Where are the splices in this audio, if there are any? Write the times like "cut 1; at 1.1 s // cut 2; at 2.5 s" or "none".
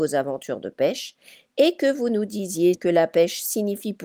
cut 1; at 2.7 s